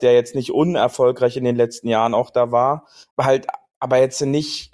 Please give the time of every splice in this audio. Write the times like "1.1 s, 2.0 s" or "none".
3.1 s

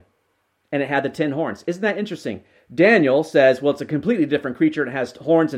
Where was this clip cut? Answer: none

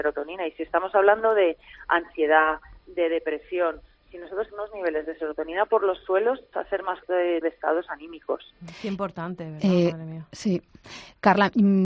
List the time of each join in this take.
4.5 s, 6.5 s, 7.0 s, 7.4 s

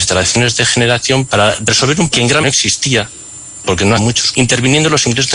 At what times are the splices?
1.3 s, 2.1 s, 2.4 s, 4.0 s, 4.3 s

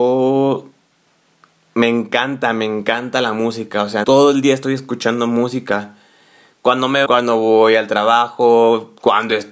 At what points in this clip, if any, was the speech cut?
4.0 s, 7.1 s

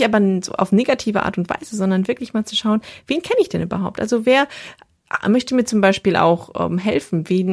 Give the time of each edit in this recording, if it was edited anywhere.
none

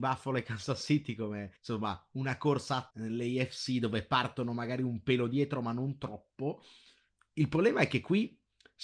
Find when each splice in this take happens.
1.6 s, 2.9 s

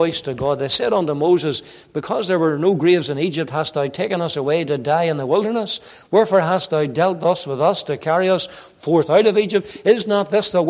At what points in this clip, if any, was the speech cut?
none

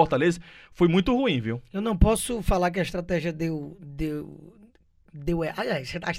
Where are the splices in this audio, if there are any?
none

